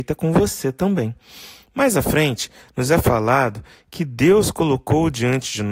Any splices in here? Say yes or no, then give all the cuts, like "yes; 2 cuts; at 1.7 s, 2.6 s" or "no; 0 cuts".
no; 0 cuts